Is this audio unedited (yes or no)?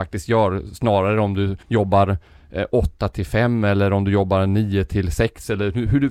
no